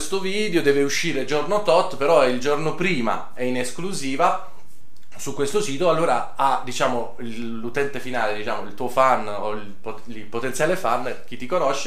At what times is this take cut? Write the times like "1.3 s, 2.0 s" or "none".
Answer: none